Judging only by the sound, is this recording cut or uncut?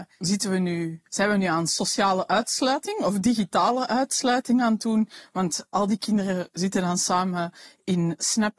cut